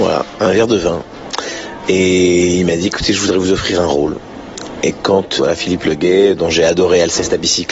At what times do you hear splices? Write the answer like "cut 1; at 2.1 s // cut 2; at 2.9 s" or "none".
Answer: cut 1; at 5.4 s

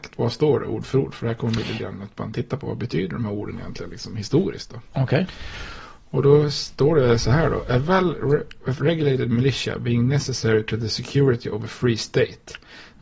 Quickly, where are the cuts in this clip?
cut 1; at 1.8 s // cut 2; at 8.8 s

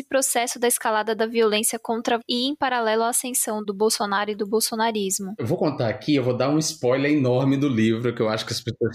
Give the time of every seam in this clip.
cut 1; at 2.2 s

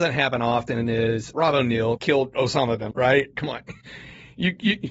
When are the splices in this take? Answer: cut 1; at 1.3 s // cut 2; at 2.0 s // cut 3; at 2.9 s // cut 4; at 3.3 s // cut 5; at 3.8 s

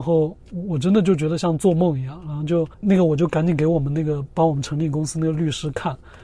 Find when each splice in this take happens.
cut 1; at 2.7 s

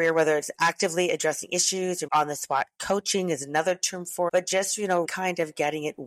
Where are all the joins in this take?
cut 1; at 2.1 s // cut 2; at 4.3 s // cut 3; at 5.0 s

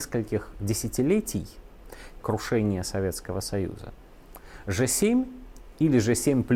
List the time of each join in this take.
cut 1; at 2.2 s

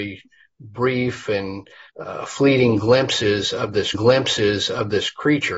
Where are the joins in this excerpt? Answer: cut 1; at 1.9 s // cut 2; at 3.9 s

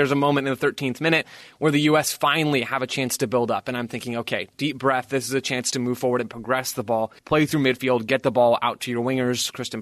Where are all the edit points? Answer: cut 1; at 7.2 s

